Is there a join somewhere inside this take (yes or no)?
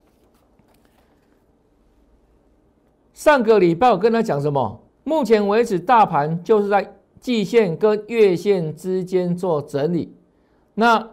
yes